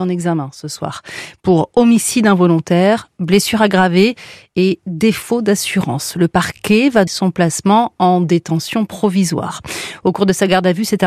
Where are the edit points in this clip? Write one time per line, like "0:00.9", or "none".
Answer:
0:07.1